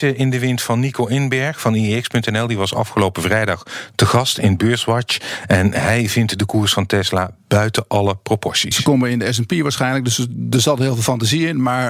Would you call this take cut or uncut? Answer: uncut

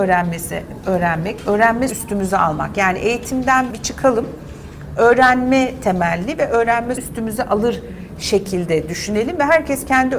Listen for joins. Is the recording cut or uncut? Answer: cut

